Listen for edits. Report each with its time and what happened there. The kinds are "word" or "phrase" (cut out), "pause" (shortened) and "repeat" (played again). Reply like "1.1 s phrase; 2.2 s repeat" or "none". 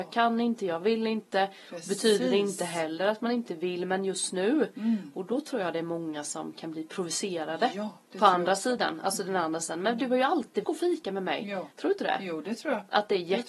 8.1 s pause; 10.6 s word; 11.7 s pause